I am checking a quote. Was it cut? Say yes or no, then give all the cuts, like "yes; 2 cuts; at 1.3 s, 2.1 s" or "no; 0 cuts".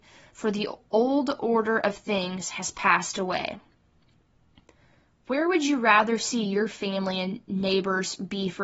no; 0 cuts